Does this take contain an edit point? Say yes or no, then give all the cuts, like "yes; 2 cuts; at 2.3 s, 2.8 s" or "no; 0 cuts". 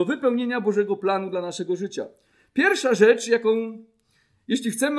no; 0 cuts